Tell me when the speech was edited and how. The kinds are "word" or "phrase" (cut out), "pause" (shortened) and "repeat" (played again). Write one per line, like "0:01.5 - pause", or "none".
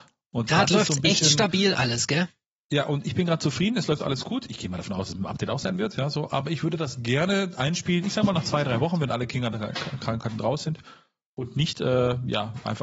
none